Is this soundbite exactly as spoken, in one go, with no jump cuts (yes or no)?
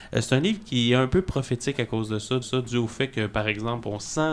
no